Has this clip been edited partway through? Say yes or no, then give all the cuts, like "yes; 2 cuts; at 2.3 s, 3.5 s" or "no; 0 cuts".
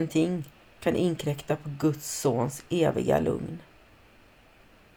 no; 0 cuts